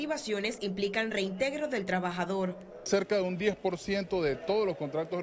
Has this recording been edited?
no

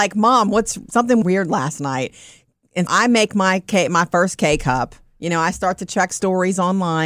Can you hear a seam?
yes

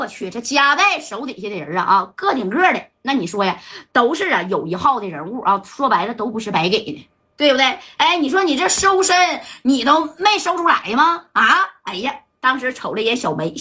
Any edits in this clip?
no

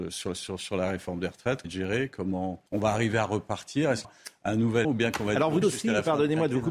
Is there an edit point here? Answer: yes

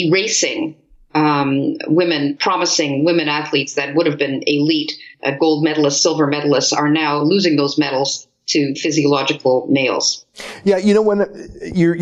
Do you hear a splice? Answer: yes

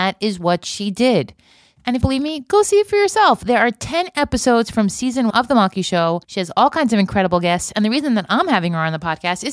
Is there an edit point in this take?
yes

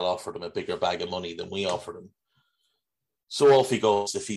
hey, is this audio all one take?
yes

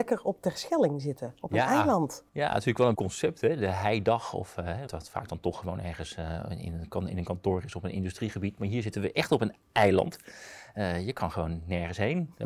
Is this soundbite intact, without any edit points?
no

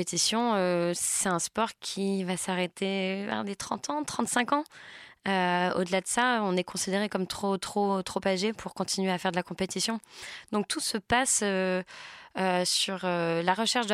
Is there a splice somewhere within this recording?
no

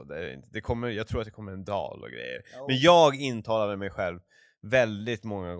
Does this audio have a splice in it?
no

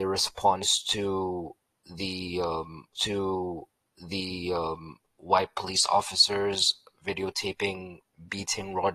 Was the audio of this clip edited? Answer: yes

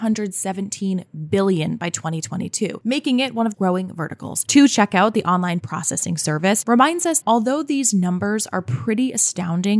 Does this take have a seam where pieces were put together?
yes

